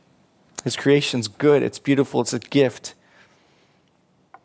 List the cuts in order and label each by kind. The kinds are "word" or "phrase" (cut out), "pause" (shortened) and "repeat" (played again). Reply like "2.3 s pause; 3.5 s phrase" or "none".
none

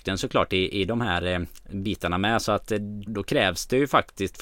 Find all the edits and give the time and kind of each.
3.1 s word

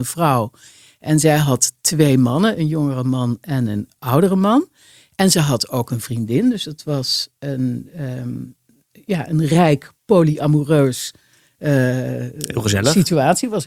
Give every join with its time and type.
none

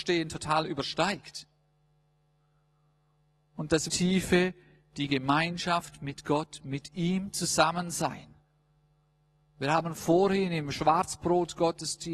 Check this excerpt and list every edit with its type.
3.9 s word

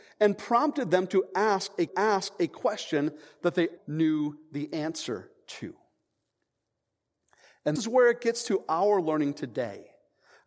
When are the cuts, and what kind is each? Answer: 1.9 s repeat; 3.8 s word; 7.8 s word

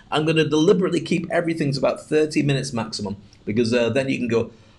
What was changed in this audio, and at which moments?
none

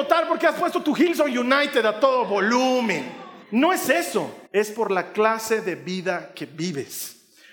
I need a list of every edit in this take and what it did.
3.4 s pause; 4.5 s pause

